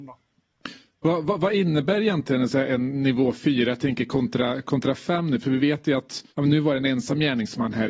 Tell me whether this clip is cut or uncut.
cut